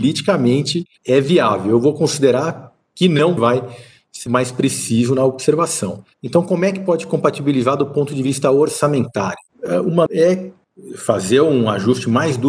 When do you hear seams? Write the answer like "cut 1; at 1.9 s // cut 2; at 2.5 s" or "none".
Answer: cut 1; at 3.4 s // cut 2; at 4.3 s // cut 3; at 10.1 s